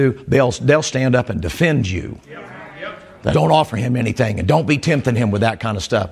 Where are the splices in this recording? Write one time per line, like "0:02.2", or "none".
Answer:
0:03.3